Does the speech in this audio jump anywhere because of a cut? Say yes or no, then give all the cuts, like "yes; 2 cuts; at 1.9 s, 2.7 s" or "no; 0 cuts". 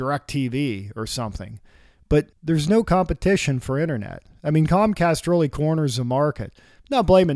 yes; 1 cut; at 2.3 s